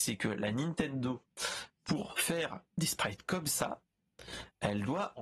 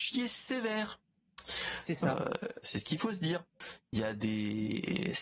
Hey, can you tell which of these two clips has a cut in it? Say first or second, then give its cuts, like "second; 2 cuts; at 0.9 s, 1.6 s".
second; 1 cut; at 2.6 s